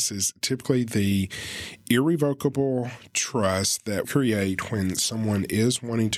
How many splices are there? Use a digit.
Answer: 1